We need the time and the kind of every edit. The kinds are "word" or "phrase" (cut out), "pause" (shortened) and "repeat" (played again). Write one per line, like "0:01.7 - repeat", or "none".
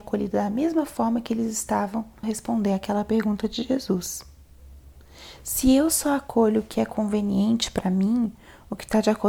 0:02.2 - word